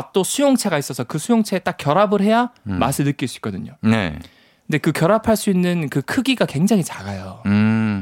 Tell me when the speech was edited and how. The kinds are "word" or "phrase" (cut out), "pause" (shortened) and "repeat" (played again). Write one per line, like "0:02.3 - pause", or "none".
none